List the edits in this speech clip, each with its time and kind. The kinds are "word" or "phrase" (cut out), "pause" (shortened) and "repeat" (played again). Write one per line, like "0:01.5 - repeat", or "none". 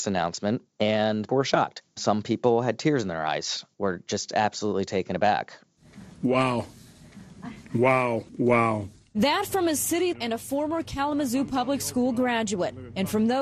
0:01.3 - word
0:03.7 - word
0:08.3 - pause
0:10.1 - word

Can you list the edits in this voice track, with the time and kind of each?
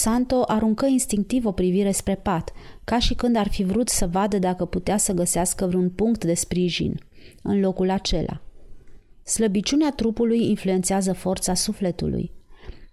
none

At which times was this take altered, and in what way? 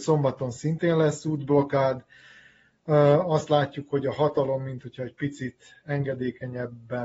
none

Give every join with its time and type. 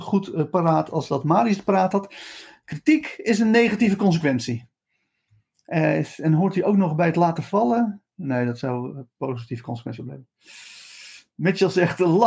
none

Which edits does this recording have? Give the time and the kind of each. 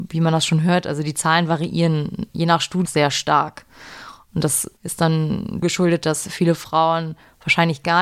0:02.9 - word
0:04.8 - pause
0:05.6 - word

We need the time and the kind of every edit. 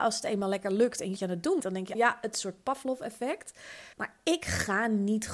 0:01.2 - phrase
0:01.6 - word
0:01.9 - word
0:03.9 - pause

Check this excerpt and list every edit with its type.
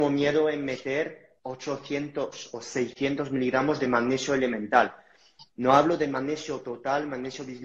0:01.4 - pause

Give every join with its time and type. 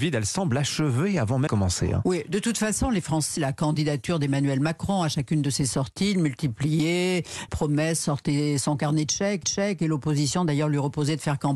0:01.5 - word
0:03.4 - phrase
0:07.5 - word
0:09.4 - repeat

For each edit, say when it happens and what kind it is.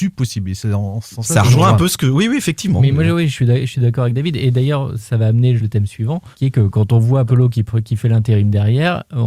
0:05.0 - word
0:05.6 - phrase
0:06.3 - pause
0:07.3 - word

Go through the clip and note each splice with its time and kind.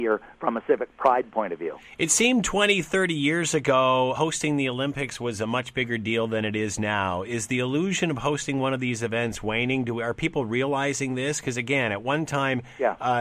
0:04.1 - word

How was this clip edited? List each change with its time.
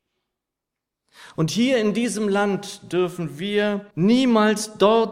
0:03.9 - pause

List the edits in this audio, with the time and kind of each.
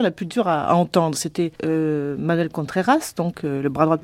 0:01.6 - pause

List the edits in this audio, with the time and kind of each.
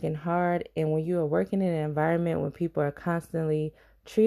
none

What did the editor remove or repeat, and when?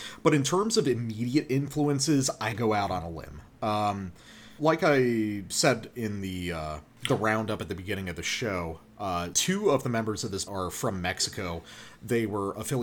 0:02.5 - phrase
0:04.6 - word
0:09.3 - word
0:10.5 - word

